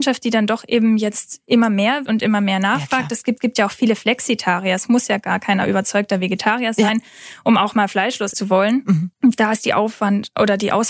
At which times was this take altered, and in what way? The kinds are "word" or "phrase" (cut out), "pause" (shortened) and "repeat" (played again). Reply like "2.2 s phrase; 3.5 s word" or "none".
2.1 s word; 3.4 s repeat; 8.3 s word; 9.1 s pause